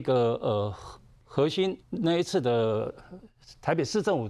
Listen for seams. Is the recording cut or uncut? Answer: cut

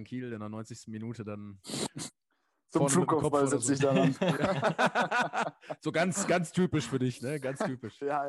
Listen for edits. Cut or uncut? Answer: uncut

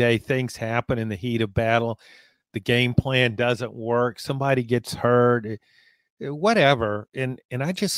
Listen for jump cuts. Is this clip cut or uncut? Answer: uncut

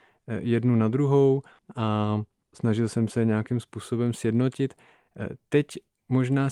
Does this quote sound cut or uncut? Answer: uncut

